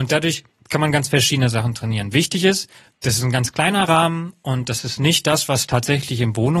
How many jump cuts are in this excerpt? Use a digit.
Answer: 1